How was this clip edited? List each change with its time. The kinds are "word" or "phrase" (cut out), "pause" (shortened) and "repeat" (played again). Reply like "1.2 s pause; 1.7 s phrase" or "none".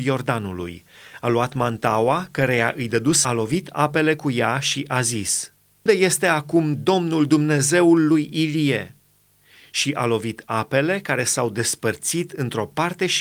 3.2 s phrase; 5.9 s word